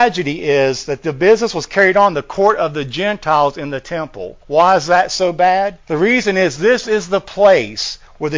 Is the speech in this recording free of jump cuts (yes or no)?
no